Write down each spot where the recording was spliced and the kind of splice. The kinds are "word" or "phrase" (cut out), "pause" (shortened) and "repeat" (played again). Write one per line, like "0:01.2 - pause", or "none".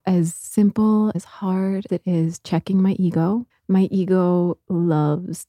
0:01.1 - word
0:01.9 - word
0:03.5 - pause